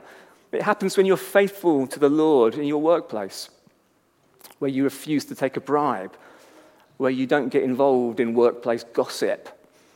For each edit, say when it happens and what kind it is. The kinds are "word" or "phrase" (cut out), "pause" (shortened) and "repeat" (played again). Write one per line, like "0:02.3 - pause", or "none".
none